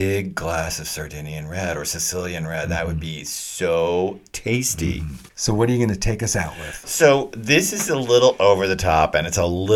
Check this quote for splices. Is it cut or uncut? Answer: uncut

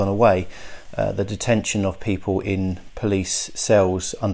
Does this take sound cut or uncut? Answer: uncut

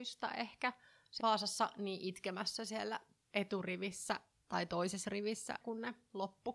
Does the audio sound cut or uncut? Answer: cut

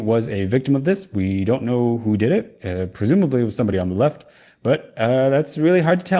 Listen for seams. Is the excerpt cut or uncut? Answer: uncut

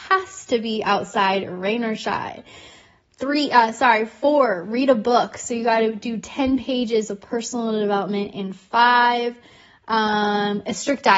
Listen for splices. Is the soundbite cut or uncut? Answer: uncut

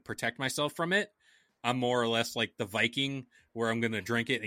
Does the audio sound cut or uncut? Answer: uncut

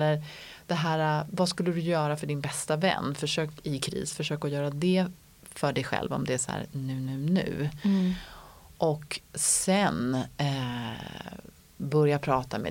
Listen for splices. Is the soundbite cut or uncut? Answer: uncut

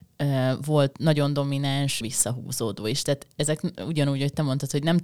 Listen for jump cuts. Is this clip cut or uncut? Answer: cut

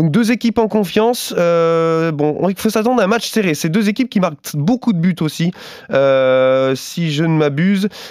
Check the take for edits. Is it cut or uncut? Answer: uncut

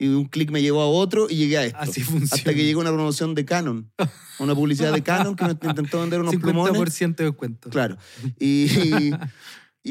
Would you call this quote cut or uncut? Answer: uncut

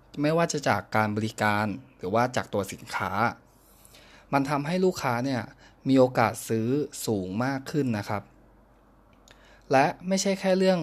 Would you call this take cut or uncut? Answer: uncut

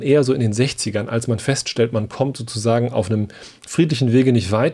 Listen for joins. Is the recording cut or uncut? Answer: uncut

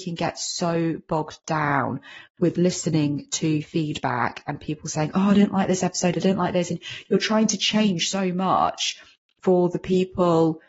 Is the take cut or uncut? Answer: uncut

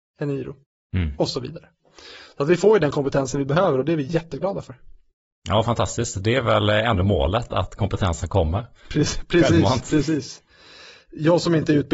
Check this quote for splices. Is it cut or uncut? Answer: uncut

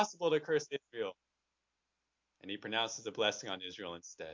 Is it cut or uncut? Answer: uncut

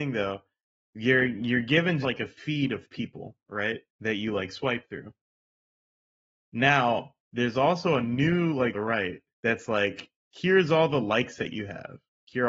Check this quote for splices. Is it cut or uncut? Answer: cut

